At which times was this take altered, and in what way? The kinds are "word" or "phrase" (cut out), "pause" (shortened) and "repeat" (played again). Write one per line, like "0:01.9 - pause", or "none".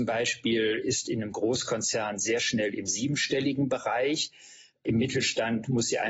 none